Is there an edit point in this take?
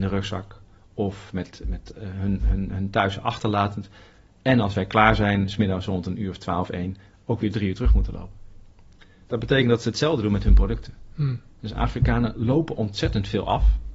no; 0 cuts

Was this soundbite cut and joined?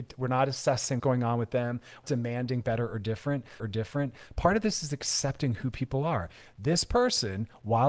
yes; 3 cuts; at 1.0 s, 2.0 s, 3.6 s

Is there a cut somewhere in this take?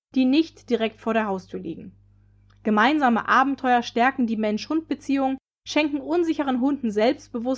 no; 0 cuts

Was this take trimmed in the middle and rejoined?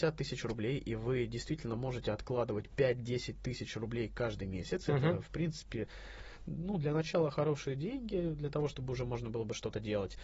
no; 0 cuts

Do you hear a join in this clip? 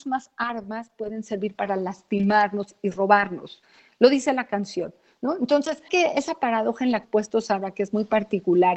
yes; 2 cuts; at 5.9 s, 7.0 s

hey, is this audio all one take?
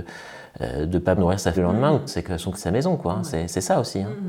no; 4 cuts; at 1.2 s, 1.5 s, 2.1 s, 2.5 s

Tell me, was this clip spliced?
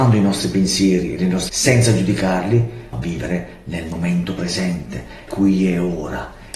yes; 3 cuts; at 1.5 s, 2.9 s, 5.3 s

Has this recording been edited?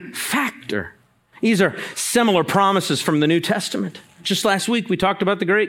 no; 0 cuts

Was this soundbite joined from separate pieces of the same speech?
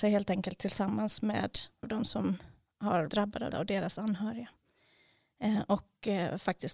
yes; 3 cuts; at 1.8 s, 3.1 s, 3.5 s

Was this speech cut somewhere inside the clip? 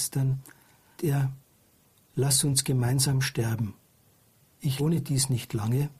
yes; 2 cuts; at 1.0 s, 4.8 s

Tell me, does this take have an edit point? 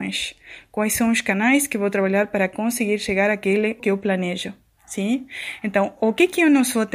yes; 1 cut; at 3.8 s

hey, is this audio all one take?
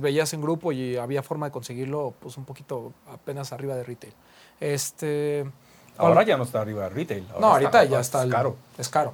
yes; 0 cuts

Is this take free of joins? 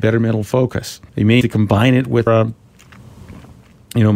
no; 3 cuts; at 1.1 s, 1.4 s, 2.3 s

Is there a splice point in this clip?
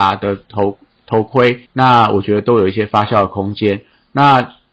yes; 1 cut; at 1.7 s

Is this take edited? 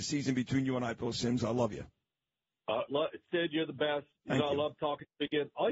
yes; 1 cut; at 2.9 s

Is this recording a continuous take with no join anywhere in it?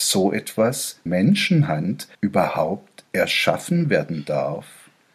no; 2 cuts; at 1.1 s, 2.1 s

